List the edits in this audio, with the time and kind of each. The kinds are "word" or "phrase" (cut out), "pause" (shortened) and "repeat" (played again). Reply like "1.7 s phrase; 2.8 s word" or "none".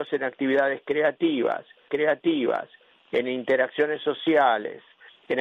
1.9 s repeat